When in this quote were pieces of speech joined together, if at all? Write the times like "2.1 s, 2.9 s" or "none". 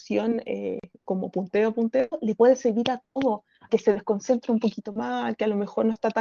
3.7 s